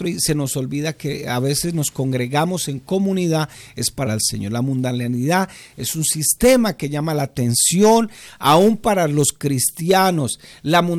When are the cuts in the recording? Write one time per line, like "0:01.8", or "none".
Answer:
0:04.1